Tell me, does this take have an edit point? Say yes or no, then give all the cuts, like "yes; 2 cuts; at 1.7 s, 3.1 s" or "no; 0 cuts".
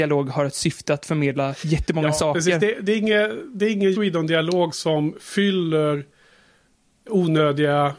yes; 2 cuts; at 3.9 s, 4.7 s